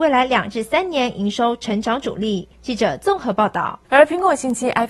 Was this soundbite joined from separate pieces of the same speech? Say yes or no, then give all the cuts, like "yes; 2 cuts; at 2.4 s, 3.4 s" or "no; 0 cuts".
yes; 2 cuts; at 2.5 s, 3.8 s